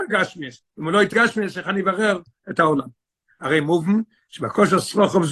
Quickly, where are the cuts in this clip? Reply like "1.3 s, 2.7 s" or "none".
1.1 s